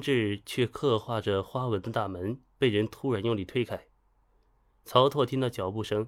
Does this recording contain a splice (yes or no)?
no